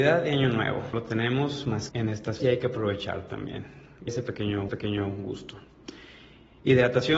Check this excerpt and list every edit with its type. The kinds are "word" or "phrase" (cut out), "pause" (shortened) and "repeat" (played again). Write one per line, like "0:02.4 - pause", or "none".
0:00.9 - word
0:01.9 - word
0:02.4 - word
0:04.1 - word
0:04.7 - repeat